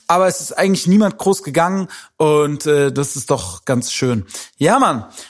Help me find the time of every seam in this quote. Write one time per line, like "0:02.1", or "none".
none